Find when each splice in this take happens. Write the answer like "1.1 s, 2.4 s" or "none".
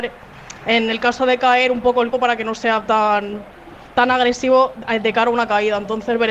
2.1 s